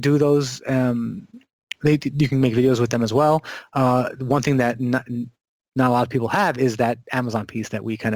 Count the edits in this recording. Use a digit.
0